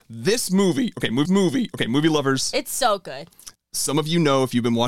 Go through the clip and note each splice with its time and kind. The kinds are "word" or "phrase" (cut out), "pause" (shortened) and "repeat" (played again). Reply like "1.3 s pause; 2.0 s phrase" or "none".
1.2 s repeat; 3.5 s pause